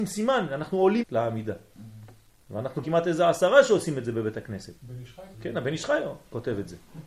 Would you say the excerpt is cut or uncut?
cut